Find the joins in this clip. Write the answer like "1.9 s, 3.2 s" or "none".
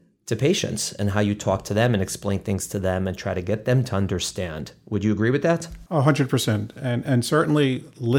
none